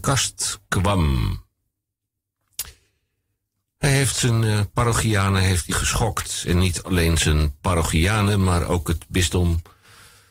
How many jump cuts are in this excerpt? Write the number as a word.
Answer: one